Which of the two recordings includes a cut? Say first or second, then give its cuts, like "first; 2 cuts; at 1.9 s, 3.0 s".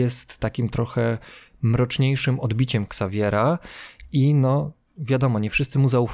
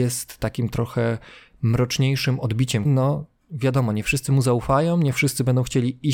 second; 1 cut; at 2.9 s